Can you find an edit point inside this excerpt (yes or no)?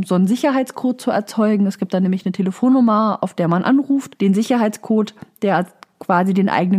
no